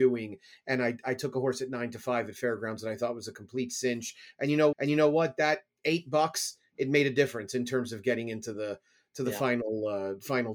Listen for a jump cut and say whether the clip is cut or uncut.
cut